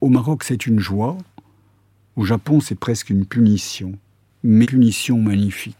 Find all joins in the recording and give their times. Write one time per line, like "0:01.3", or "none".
0:04.6

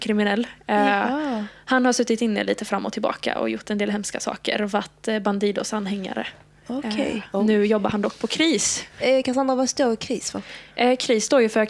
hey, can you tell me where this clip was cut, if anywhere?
none

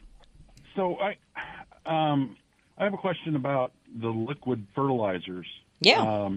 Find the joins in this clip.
none

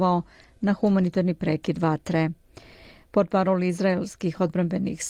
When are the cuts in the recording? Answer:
none

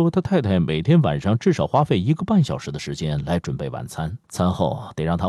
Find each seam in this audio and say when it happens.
0:04.2

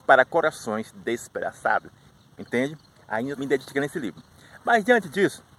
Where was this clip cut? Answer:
0:02.2
0:03.4

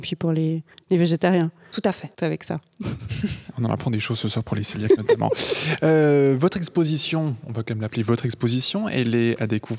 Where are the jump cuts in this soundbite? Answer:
0:02.1

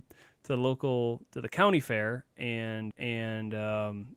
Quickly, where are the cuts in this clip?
0:02.9

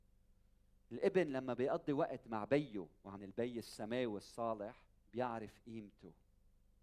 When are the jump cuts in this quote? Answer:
0:03.2
0:05.0

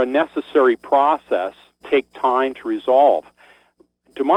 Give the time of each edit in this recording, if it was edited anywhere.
0:01.8

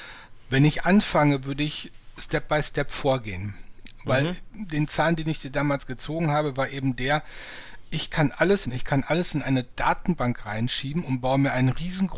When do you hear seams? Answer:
0:08.7

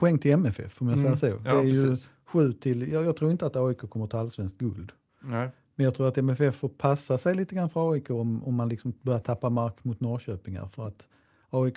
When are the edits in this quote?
none

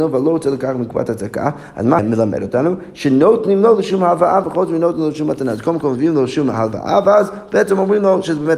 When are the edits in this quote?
0:02.0

